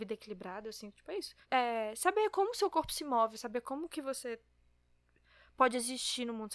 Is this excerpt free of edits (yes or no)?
no